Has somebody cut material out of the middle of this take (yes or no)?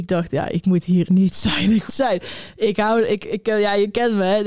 yes